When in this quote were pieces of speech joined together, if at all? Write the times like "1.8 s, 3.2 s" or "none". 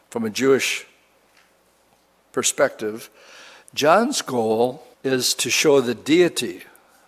4.9 s